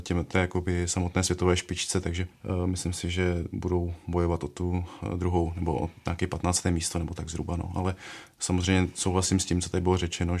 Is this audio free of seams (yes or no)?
yes